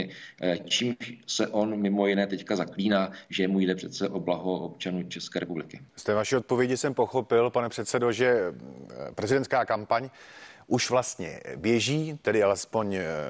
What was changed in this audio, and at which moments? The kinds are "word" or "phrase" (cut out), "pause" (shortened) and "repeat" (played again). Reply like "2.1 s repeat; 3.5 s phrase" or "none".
5.9 s pause